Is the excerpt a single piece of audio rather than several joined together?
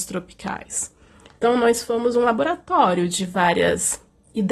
yes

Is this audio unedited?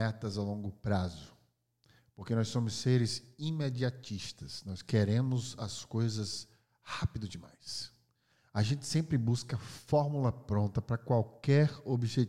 yes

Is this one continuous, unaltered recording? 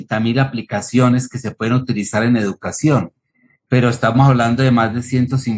yes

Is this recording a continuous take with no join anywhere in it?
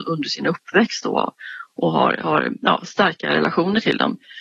yes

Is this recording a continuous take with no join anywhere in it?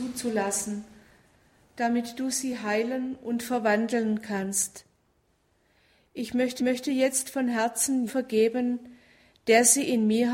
no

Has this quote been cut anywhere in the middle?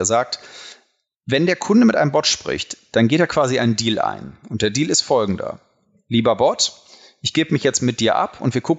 no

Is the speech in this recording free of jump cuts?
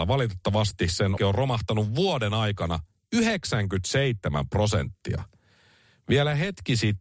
no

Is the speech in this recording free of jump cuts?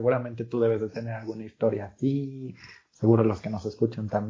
yes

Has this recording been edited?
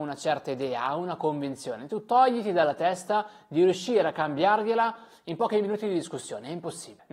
no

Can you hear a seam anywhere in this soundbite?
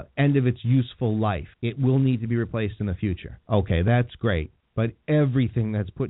yes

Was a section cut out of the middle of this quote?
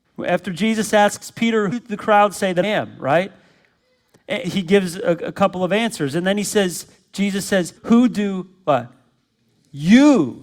yes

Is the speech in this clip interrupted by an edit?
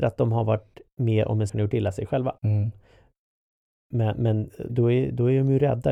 yes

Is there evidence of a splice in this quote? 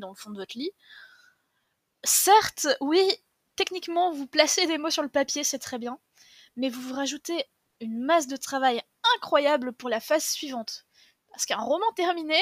no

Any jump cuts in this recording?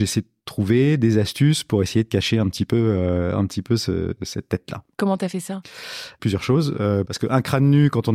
no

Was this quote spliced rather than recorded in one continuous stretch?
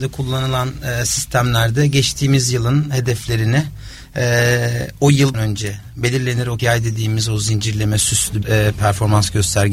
yes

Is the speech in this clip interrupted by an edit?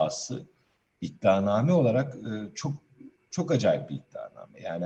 no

